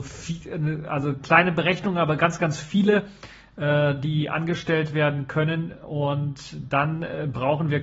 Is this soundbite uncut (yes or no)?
yes